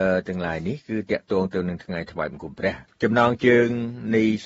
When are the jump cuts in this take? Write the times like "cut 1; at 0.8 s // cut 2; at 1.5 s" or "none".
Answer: cut 1; at 2.9 s